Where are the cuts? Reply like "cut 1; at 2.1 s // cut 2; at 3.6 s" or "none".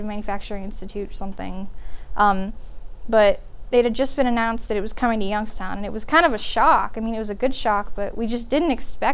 none